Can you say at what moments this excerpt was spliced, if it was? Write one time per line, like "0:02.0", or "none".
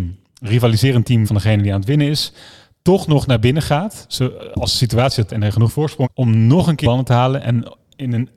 0:01.2
0:05.3
0:06.0
0:06.8